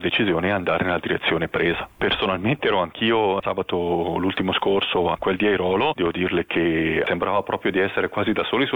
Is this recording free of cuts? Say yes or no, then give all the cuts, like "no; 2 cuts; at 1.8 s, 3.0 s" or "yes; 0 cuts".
yes; 0 cuts